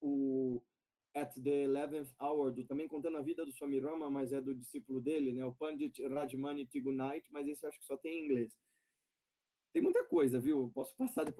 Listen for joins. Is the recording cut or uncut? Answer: cut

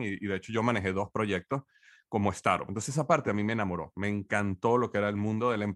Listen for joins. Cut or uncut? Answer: uncut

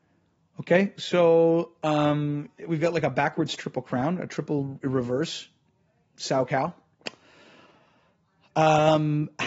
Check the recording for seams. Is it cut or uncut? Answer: uncut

